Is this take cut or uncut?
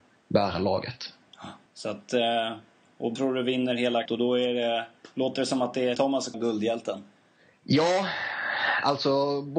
cut